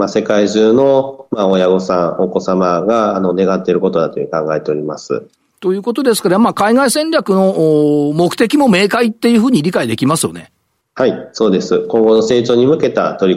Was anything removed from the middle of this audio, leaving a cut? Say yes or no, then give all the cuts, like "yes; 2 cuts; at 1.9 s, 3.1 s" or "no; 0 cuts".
yes; 2 cuts; at 5.5 s, 10.8 s